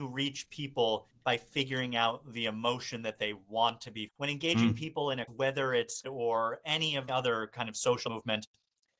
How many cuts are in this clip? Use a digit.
5